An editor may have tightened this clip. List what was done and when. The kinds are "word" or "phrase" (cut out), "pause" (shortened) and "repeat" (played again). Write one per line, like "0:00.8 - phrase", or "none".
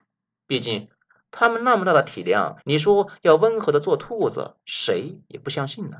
0:02.6 - pause
0:04.6 - pause